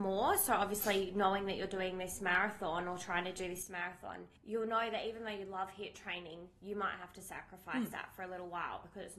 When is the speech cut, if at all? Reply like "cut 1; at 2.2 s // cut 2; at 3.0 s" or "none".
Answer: cut 1; at 4.4 s